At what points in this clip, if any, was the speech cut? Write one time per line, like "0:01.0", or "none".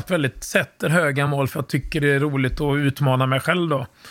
none